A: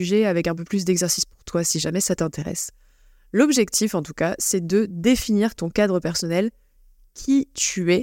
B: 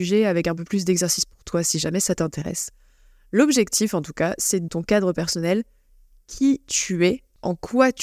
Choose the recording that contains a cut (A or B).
B